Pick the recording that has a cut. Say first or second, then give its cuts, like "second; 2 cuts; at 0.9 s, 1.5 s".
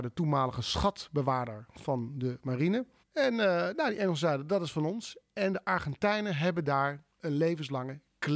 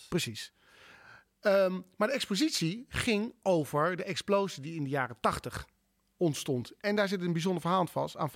first; 1 cut; at 3.0 s